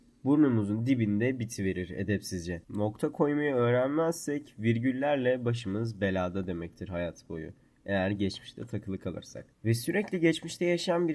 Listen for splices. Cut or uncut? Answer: cut